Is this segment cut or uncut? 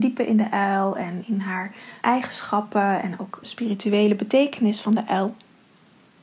cut